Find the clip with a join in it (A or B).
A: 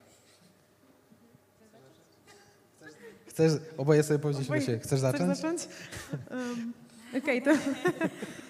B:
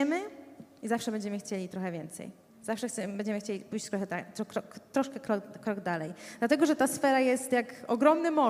B